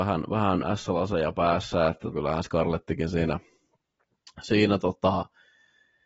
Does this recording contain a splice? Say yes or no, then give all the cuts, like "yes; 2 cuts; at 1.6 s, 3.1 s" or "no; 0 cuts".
yes; 1 cut; at 2.1 s